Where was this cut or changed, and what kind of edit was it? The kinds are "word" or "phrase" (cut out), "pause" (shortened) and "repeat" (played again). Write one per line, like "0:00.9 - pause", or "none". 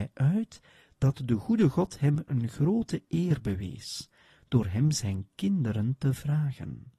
none

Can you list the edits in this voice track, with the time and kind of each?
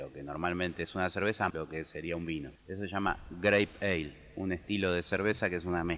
0:01.5 - word
0:02.5 - pause

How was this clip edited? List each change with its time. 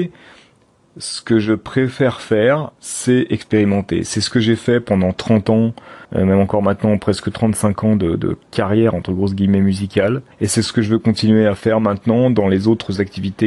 0:02.7 - pause
0:06.0 - pause
0:08.4 - pause
0:10.3 - pause

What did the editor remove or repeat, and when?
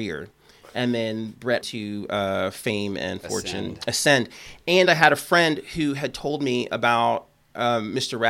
0:01.6 - phrase

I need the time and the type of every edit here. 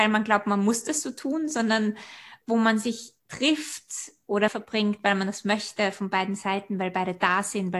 0:02.4 - pause
0:03.2 - pause
0:04.5 - phrase

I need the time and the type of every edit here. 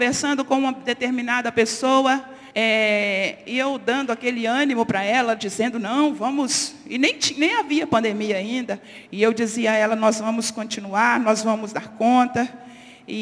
0:02.5 - pause
0:05.4 - word

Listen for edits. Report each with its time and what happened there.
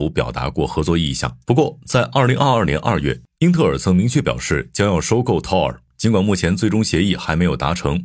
0:01.4 - pause

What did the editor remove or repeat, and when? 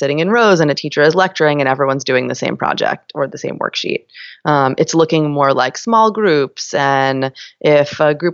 none

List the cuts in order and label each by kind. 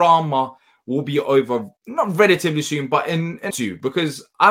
0:01.8 - pause
0:03.5 - phrase

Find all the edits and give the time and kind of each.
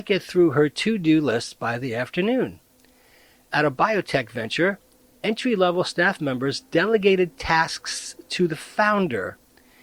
none

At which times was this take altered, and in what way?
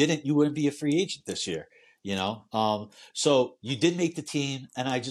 none

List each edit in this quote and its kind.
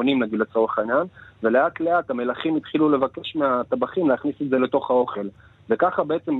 none

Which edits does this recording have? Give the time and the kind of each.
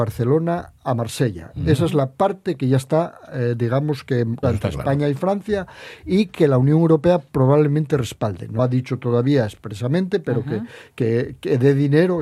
0:04.4 - word
0:08.6 - word

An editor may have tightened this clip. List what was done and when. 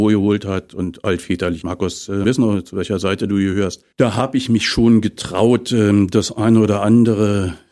0:01.6 - phrase
0:02.2 - phrase
0:03.9 - pause

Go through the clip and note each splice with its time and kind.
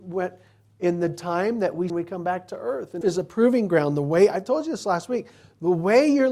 0:01.9 - phrase
0:03.0 - phrase

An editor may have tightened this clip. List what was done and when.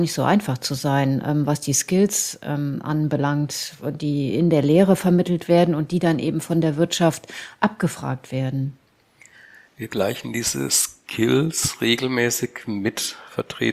none

